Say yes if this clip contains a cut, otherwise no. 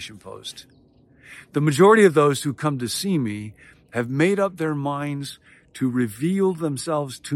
no